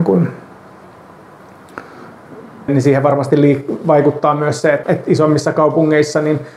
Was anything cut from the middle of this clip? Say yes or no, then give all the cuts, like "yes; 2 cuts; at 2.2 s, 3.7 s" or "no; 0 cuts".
yes; 2 cuts; at 2.7 s, 4.8 s